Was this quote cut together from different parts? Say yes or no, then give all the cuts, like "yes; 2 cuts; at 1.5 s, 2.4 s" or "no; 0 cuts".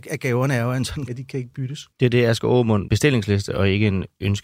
yes; 3 cuts; at 1.1 s, 1.9 s, 2.9 s